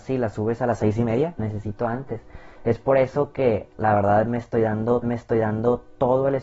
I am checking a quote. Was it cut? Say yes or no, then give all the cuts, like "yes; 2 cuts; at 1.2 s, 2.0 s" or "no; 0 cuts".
yes; 3 cuts; at 1.4 s, 3.7 s, 5.0 s